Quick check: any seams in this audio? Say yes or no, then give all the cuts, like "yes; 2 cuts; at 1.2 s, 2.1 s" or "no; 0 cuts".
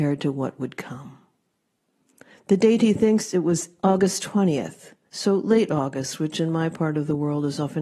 no; 0 cuts